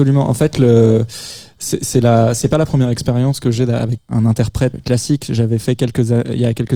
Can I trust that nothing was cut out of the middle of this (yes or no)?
no